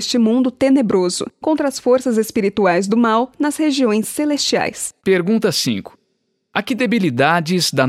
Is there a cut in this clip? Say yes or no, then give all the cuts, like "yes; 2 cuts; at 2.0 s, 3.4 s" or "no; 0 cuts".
yes; 2 cuts; at 1.3 s, 5.0 s